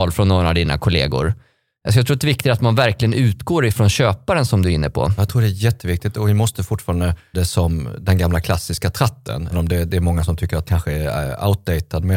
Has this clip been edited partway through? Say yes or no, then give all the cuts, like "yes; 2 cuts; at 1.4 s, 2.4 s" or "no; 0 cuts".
yes; 3 cuts; at 7.3 s, 9.5 s, 10.7 s